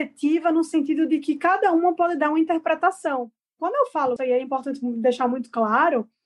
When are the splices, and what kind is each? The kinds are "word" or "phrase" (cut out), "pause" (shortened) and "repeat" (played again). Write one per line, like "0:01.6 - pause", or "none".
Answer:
0:04.2 - word